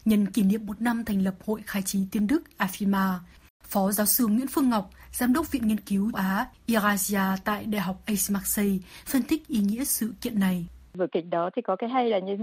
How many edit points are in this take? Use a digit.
1